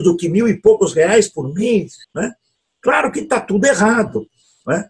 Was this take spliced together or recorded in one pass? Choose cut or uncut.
cut